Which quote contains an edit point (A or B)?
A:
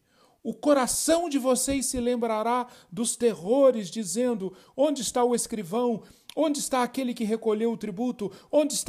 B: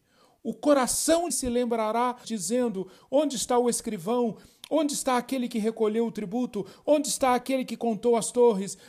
B